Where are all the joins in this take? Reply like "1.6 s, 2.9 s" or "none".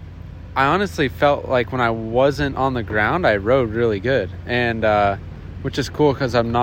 none